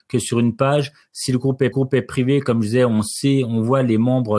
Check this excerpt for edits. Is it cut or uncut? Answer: cut